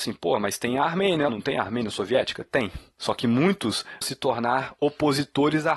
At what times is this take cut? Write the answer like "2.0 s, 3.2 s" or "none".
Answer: 1.3 s, 4.0 s